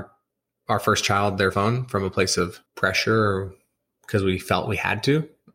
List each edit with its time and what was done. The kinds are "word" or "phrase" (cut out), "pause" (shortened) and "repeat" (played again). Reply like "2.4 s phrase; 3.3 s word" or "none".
1.5 s word; 2.7 s pause